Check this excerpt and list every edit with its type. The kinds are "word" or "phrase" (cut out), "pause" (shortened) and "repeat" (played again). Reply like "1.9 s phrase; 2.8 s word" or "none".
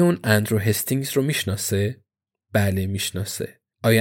none